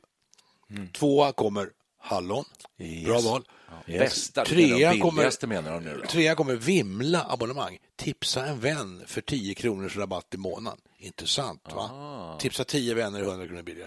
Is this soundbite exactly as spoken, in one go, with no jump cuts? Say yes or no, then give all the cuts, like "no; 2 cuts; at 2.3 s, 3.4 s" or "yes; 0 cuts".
yes; 0 cuts